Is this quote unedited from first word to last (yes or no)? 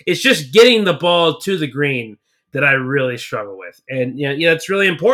yes